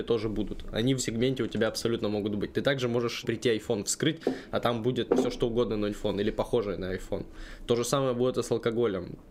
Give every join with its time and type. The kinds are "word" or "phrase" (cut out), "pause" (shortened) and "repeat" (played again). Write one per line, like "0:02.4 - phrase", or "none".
0:01.0 - word
0:03.2 - word
0:05.1 - word
0:05.9 - word